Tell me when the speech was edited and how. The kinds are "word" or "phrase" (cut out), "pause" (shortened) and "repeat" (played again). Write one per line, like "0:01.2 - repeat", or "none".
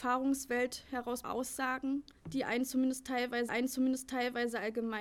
0:01.2 - word
0:02.2 - pause
0:03.5 - repeat